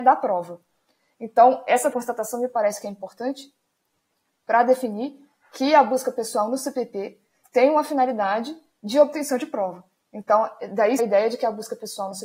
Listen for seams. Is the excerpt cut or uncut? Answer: cut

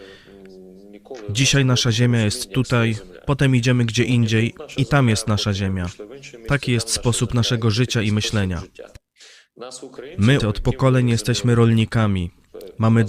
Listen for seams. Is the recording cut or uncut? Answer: cut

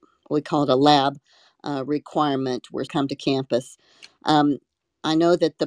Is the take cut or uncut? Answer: cut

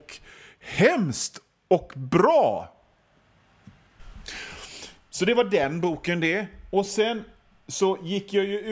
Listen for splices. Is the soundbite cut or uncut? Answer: uncut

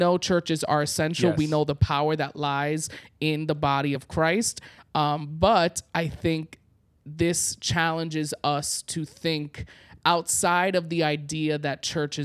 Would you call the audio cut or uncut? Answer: uncut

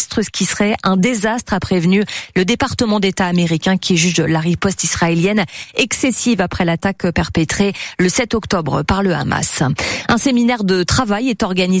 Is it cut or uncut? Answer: uncut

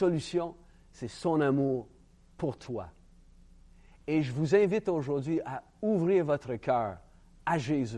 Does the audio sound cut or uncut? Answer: uncut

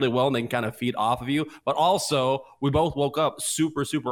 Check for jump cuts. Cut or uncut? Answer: uncut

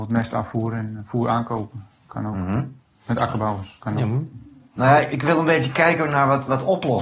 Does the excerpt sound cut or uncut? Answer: cut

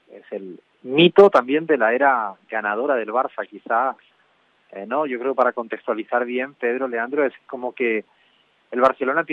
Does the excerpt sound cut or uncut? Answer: uncut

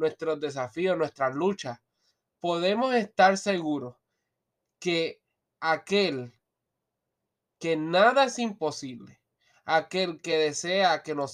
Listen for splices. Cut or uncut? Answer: uncut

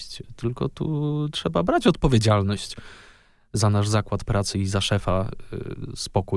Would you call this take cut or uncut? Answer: uncut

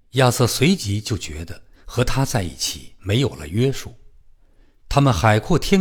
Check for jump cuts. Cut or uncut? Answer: uncut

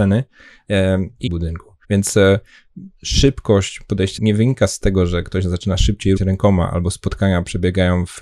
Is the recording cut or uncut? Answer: cut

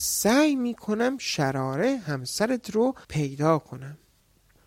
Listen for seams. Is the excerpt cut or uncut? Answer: cut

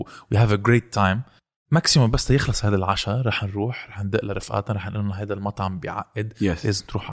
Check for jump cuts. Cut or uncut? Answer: cut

